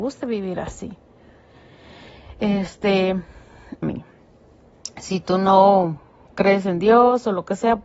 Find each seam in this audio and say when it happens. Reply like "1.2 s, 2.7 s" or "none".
3.8 s